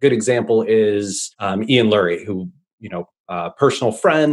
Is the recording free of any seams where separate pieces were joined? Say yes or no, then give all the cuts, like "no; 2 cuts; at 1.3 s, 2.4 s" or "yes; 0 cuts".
yes; 0 cuts